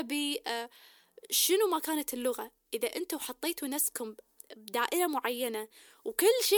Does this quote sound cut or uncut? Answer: uncut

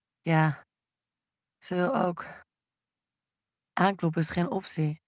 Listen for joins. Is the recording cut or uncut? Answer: uncut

